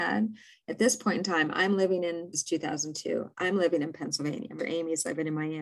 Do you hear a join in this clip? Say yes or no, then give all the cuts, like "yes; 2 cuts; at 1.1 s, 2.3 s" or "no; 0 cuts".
yes; 2 cuts; at 2.3 s, 4.6 s